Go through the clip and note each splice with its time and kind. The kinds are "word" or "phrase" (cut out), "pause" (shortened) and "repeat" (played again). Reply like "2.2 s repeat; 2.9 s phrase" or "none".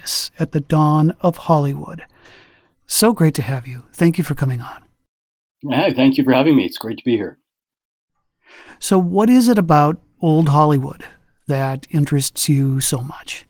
none